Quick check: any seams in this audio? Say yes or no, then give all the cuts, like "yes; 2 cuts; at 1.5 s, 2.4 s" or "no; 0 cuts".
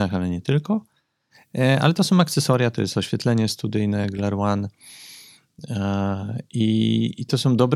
no; 0 cuts